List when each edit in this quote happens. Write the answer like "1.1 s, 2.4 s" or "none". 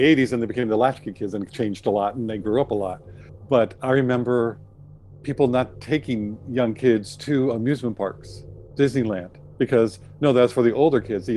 none